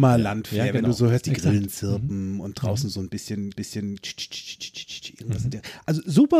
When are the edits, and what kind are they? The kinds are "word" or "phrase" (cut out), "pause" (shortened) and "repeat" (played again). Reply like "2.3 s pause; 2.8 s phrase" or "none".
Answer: 3.6 s repeat